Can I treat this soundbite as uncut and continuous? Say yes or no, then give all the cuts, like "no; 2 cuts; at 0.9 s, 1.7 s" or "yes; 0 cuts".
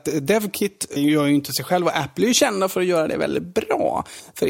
no; 1 cut; at 1.0 s